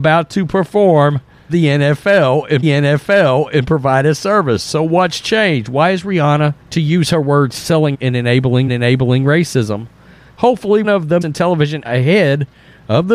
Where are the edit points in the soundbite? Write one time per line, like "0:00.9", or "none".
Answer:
0:01.5
0:02.6
0:06.6
0:07.9
0:08.7
0:10.8
0:11.2
0:11.8